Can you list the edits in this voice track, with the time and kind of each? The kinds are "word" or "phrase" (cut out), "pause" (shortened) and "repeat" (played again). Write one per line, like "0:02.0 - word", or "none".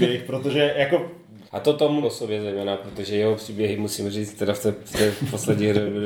0:01.5 - pause
0:02.0 - word